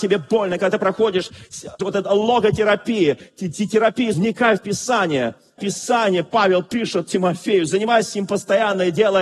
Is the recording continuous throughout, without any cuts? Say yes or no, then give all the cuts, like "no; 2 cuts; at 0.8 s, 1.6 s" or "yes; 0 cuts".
no; 3 cuts; at 1.8 s, 4.1 s, 5.6 s